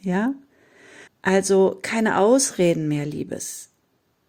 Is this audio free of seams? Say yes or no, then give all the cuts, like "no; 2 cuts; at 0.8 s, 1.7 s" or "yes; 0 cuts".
no; 1 cut; at 1.1 s